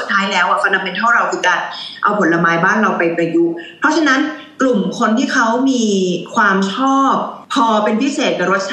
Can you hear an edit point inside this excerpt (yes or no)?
no